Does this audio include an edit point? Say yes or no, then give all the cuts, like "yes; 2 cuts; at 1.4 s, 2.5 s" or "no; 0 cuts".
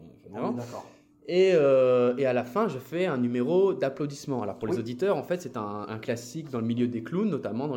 no; 0 cuts